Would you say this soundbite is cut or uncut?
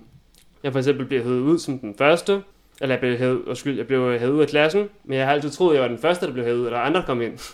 cut